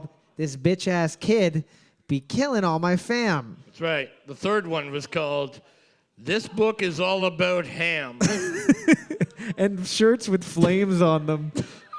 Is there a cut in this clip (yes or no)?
no